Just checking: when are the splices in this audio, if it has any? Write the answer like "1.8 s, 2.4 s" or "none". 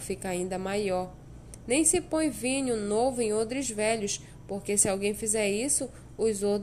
none